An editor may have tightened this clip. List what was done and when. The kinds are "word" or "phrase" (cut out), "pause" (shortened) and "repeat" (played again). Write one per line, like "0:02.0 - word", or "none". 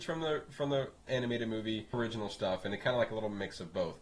0:01.1 - word
0:01.9 - word